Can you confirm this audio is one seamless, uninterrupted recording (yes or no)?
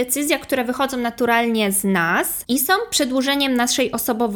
yes